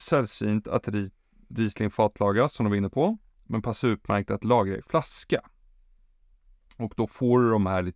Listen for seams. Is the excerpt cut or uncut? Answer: uncut